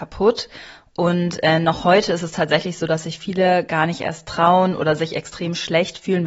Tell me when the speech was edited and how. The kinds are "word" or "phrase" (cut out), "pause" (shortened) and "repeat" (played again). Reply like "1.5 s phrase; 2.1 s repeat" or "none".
none